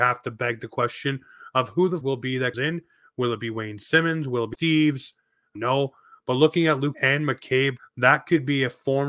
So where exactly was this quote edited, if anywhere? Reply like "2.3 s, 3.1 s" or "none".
2.0 s, 2.5 s, 4.5 s, 5.6 s, 6.9 s, 7.8 s